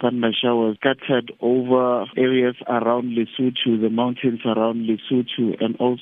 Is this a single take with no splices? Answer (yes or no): yes